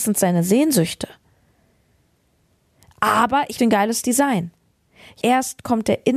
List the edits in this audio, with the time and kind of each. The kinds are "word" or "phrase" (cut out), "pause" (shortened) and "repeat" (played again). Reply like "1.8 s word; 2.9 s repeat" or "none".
3.6 s word; 5.2 s word